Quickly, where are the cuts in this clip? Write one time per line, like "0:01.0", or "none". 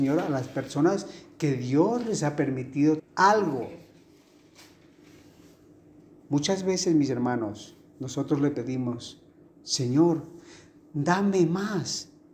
0:03.0